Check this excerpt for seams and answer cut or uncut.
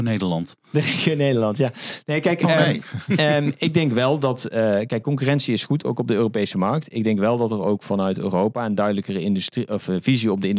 uncut